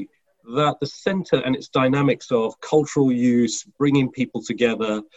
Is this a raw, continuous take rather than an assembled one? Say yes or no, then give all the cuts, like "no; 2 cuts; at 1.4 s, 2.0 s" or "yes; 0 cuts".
yes; 0 cuts